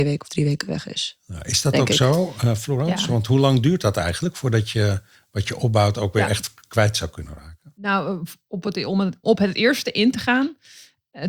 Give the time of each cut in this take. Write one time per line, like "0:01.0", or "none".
0:09.2